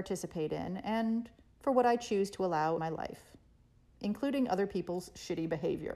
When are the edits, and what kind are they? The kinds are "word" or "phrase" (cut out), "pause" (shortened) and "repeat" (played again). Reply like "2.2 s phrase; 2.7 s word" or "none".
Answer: 2.8 s word